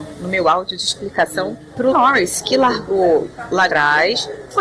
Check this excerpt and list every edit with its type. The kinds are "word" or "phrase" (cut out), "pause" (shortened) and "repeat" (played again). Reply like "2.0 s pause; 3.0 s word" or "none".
1.9 s word; 3.7 s word